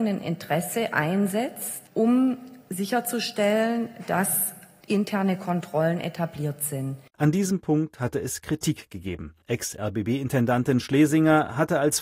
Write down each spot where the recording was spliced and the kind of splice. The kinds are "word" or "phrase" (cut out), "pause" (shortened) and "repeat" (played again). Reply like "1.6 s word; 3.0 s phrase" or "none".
1.9 s pause; 9.4 s pause